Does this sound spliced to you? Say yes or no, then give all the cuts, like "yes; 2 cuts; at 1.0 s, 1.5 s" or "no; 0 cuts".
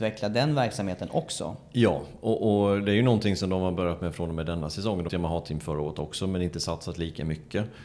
yes; 1 cut; at 5.1 s